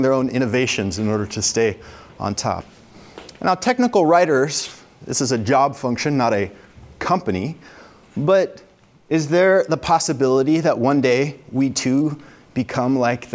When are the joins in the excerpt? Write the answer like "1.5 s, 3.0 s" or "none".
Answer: none